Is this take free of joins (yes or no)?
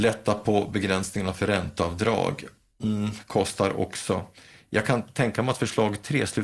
yes